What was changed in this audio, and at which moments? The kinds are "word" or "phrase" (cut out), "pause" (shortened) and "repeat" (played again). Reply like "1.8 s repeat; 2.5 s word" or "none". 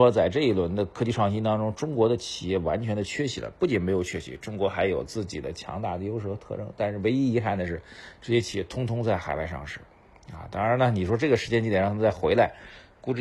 none